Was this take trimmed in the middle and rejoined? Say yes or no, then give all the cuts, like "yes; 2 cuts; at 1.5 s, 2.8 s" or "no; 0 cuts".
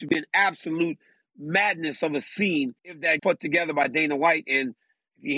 yes; 2 cuts; at 2.8 s, 3.2 s